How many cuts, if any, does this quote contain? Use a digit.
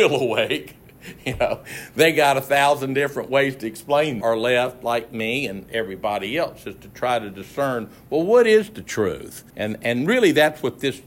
2